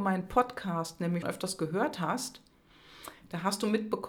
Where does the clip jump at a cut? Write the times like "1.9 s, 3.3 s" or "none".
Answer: 1.2 s